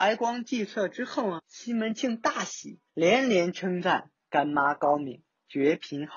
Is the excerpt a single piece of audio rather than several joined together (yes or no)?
no